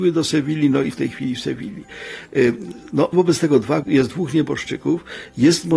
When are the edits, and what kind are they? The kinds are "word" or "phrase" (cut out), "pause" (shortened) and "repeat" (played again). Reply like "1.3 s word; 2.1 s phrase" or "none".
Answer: 0.9 s word; 3.1 s word; 3.8 s word